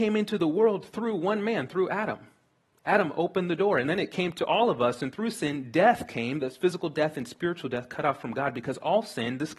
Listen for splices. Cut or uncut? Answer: uncut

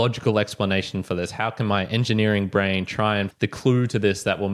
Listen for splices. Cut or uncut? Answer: cut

